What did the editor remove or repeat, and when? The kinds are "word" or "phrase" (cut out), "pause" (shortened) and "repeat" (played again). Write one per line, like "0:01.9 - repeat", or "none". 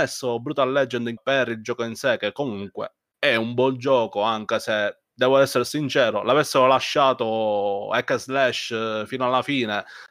0:01.2 - word